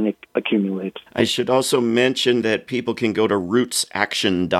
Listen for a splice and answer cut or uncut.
cut